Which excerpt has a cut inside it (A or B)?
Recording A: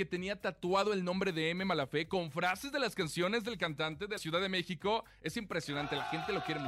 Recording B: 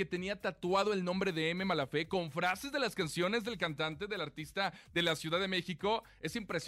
A